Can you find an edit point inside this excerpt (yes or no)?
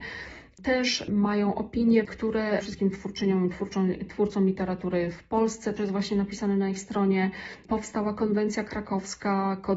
yes